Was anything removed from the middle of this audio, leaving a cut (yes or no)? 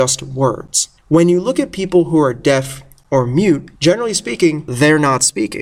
yes